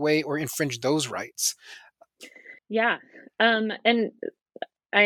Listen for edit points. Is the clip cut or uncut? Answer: cut